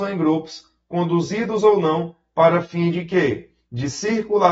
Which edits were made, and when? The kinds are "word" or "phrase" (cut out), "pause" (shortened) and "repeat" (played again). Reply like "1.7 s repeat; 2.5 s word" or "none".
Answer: none